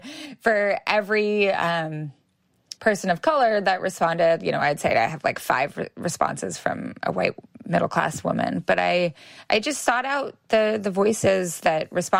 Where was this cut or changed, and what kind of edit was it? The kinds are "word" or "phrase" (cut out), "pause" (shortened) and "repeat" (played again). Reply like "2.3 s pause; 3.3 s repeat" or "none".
2.8 s pause